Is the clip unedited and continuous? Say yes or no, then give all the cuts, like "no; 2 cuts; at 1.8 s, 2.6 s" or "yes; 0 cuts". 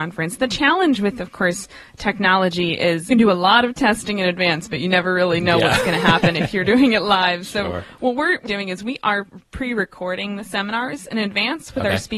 no; 2 cuts; at 3.1 s, 8.5 s